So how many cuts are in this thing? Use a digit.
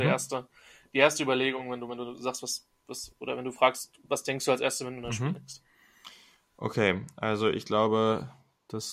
0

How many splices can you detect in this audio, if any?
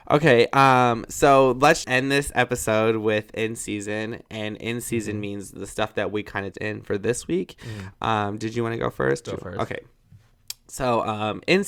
3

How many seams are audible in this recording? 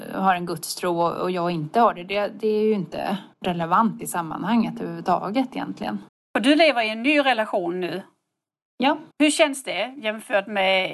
3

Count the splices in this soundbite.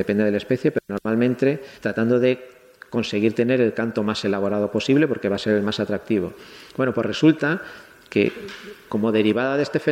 1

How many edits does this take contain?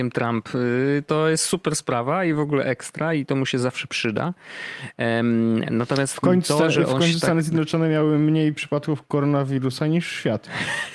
0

